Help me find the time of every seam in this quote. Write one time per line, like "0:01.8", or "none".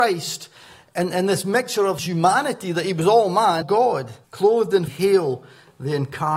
0:02.0
0:03.6
0:04.2
0:04.9